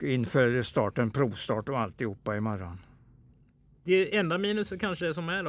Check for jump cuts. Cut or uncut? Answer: uncut